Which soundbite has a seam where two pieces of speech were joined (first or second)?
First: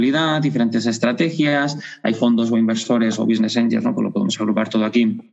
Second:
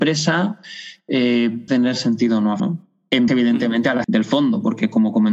second